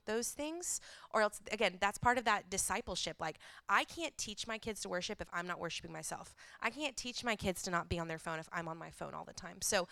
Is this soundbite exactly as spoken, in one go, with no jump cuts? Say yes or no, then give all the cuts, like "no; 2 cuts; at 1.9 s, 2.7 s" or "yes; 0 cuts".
yes; 0 cuts